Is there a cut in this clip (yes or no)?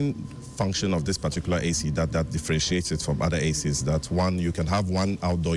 yes